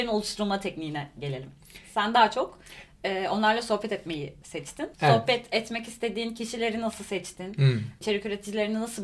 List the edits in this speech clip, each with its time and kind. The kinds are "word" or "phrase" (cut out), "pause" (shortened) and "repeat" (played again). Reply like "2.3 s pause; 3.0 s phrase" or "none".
4.9 s pause